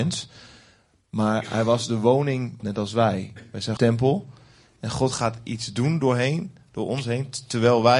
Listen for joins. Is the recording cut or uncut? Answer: cut